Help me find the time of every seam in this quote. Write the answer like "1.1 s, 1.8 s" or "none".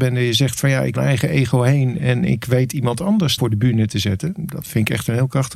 0.9 s, 3.4 s

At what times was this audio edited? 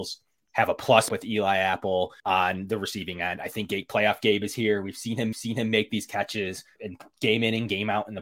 1.1 s, 2.2 s, 5.3 s, 6.8 s

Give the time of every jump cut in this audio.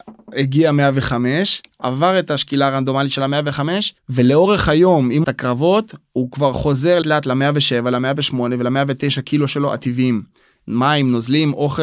4.0 s, 5.2 s, 7.0 s

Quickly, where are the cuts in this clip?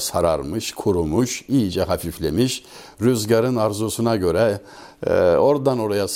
none

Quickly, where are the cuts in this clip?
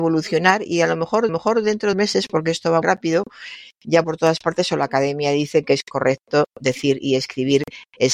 1.3 s, 1.9 s, 2.8 s, 4.0 s

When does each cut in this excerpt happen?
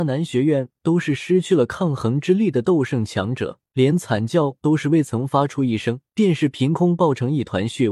3.7 s, 6.1 s

